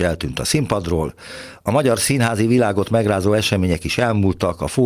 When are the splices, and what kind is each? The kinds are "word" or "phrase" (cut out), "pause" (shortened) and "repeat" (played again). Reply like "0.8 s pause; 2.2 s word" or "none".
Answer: none